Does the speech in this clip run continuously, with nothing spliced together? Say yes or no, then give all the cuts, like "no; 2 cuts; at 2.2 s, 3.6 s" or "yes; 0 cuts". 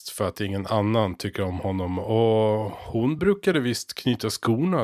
yes; 0 cuts